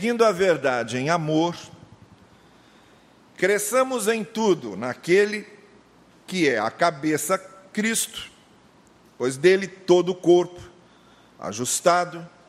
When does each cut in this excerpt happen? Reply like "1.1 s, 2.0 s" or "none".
none